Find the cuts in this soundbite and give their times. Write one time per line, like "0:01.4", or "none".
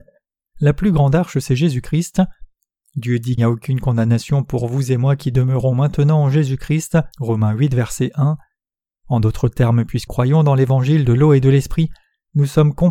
0:03.4
0:07.1
0:10.1